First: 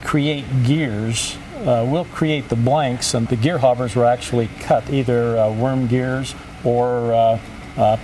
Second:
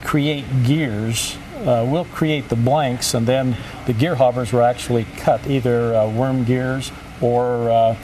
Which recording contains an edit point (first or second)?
first